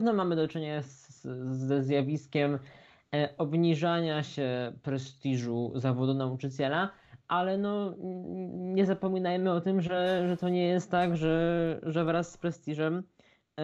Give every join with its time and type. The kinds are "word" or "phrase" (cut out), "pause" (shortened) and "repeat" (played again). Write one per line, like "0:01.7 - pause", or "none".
none